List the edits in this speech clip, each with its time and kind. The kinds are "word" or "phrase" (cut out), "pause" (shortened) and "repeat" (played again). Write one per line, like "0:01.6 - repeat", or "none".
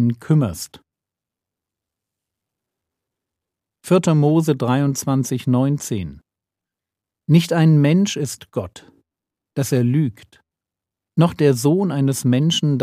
none